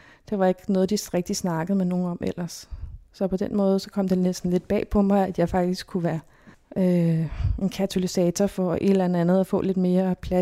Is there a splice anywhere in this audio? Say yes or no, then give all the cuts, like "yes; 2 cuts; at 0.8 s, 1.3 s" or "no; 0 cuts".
yes; 1 cut; at 6.5 s